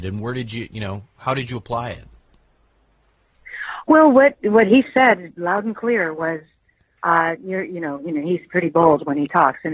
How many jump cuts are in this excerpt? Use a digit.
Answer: 0